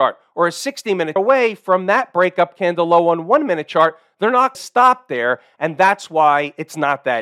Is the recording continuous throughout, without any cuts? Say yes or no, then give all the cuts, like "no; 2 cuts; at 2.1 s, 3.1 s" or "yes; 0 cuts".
no; 2 cuts; at 1.2 s, 4.5 s